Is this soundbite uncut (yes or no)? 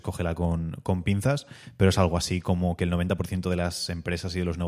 yes